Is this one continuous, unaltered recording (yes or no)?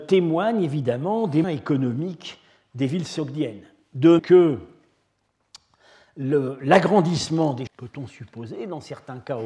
no